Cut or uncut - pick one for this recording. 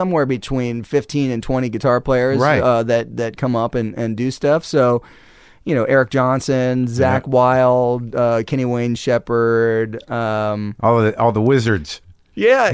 uncut